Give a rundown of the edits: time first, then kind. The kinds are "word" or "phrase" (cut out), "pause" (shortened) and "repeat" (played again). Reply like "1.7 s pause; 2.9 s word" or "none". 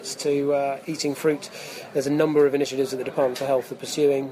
none